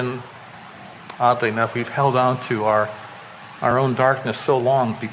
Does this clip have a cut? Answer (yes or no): no